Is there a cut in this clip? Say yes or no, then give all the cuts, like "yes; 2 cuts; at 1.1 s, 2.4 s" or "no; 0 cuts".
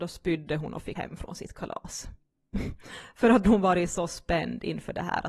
yes; 2 cuts; at 1.0 s, 3.4 s